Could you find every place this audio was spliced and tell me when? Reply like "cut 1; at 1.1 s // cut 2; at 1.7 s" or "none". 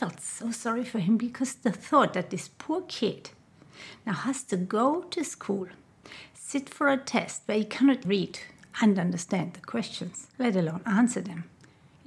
cut 1; at 8.0 s // cut 2; at 10.3 s